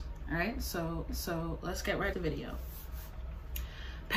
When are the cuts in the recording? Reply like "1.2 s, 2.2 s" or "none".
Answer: 1.1 s, 2.1 s

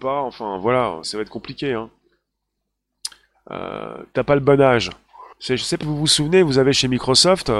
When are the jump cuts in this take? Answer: 1.0 s, 5.3 s, 5.8 s

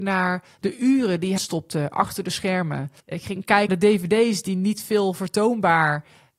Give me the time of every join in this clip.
1.4 s, 3.0 s, 3.7 s

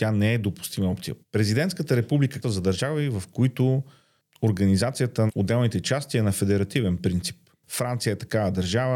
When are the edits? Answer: 1.2 s, 2.4 s, 5.3 s

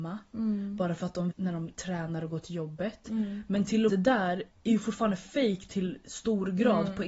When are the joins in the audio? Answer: 1.3 s, 3.9 s

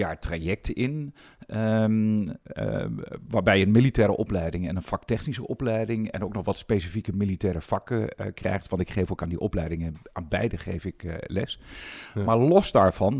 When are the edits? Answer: none

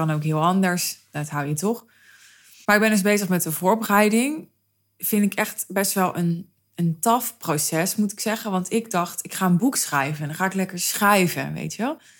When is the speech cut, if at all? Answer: none

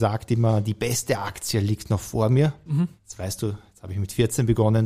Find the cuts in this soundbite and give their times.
3.0 s

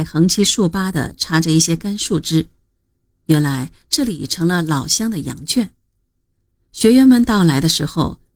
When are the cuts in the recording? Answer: none

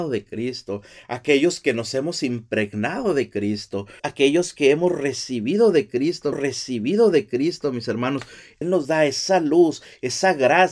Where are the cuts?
4.0 s, 6.3 s, 8.6 s

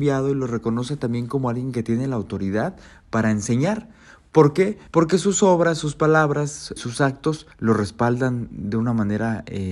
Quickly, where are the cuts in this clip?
4.9 s, 6.8 s, 7.5 s

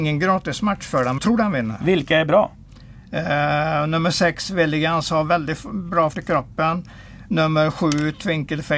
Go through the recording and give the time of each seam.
1.2 s, 6.1 s

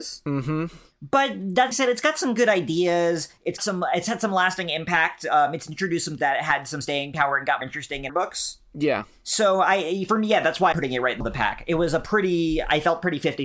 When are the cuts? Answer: 1.7 s, 3.6 s, 6.2 s, 7.6 s, 8.1 s, 10.7 s, 11.2 s

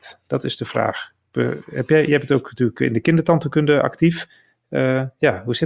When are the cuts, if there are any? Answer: none

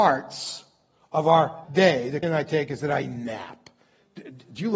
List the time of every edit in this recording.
1.6 s, 2.2 s

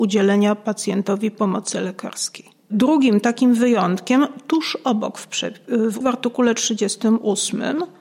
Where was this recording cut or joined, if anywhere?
6.0 s

